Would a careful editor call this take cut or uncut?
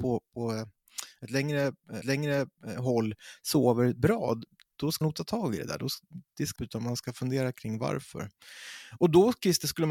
cut